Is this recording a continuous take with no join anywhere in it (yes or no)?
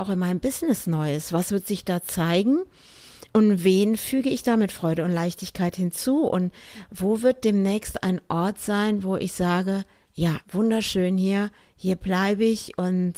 no